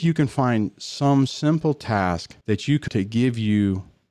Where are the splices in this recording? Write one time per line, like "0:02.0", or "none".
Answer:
0:02.4
0:02.9